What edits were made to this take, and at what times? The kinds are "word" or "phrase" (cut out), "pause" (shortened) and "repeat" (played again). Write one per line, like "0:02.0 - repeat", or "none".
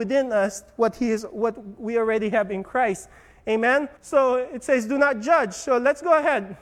0:04.0 - pause